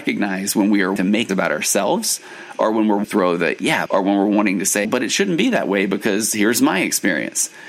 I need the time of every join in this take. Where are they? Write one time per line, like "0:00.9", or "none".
0:01.0
0:01.3
0:03.0
0:03.9
0:04.9